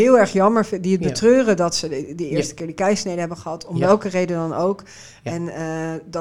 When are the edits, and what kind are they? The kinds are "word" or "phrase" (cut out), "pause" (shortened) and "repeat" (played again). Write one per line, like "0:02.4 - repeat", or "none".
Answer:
none